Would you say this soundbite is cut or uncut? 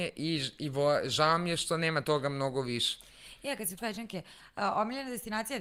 cut